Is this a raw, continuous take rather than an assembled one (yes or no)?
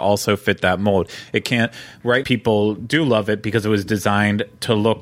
no